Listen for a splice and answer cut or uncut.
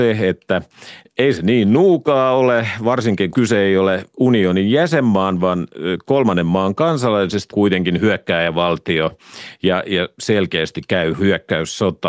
cut